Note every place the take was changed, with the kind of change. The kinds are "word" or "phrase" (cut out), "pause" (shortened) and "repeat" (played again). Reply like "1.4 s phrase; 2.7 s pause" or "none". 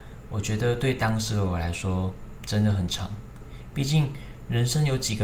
2.4 s word